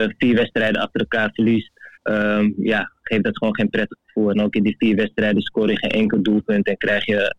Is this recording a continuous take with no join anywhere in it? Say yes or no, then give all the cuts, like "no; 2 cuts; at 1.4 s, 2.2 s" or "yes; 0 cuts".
no; 1 cut; at 2.0 s